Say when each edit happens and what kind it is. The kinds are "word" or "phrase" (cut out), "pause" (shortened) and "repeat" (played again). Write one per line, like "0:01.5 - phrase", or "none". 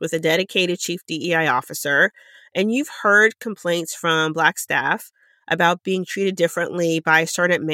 none